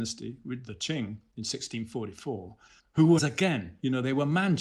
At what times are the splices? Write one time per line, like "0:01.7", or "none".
0:02.8
0:03.2